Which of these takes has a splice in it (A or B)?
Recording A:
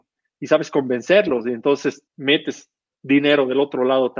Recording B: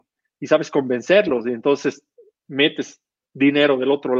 A